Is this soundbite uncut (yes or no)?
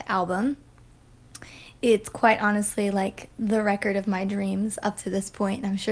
yes